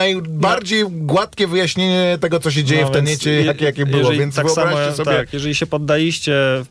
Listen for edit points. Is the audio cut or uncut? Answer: uncut